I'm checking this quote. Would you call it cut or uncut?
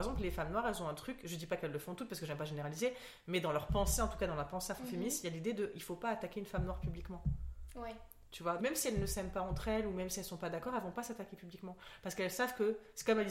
cut